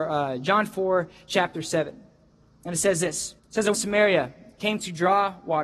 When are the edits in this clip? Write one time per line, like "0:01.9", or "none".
0:03.4
0:03.7